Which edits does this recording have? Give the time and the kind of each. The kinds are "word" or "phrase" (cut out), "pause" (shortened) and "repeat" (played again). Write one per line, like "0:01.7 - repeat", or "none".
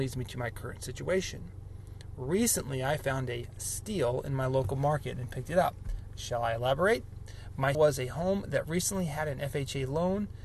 0:07.7 - word